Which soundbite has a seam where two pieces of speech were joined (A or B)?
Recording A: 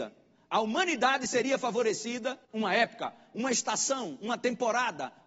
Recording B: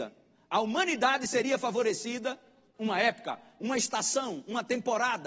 A